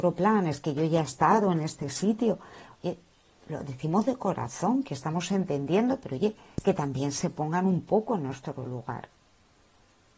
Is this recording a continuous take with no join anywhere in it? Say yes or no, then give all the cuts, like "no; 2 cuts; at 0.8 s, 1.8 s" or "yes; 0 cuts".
yes; 0 cuts